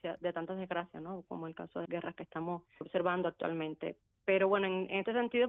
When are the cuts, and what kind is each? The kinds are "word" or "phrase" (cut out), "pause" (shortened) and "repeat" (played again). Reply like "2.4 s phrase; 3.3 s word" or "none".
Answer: 1.9 s word; 2.8 s word